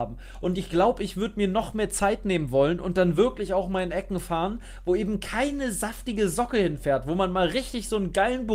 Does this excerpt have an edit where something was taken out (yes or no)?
no